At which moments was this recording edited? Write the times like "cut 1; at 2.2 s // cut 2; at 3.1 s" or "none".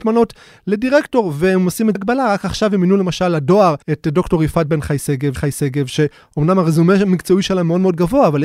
cut 1; at 2.0 s // cut 2; at 3.8 s // cut 3; at 5.4 s